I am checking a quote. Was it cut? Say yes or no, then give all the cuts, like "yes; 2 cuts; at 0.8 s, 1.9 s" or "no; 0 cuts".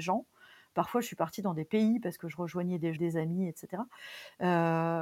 yes; 1 cut; at 2.9 s